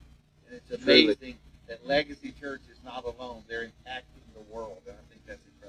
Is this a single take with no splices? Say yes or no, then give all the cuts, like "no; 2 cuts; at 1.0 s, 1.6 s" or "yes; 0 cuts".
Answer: yes; 0 cuts